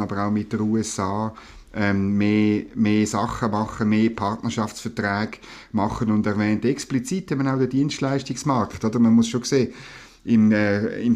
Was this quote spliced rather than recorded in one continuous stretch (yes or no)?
no